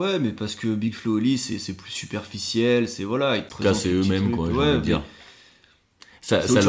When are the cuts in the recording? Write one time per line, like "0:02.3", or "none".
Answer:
none